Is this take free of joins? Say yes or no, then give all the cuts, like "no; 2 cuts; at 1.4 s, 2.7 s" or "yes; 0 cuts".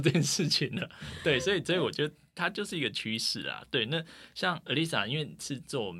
yes; 0 cuts